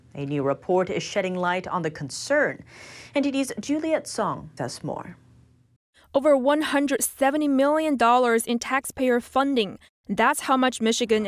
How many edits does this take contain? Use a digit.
1